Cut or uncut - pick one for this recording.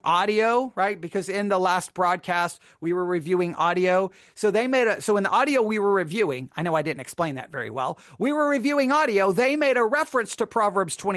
uncut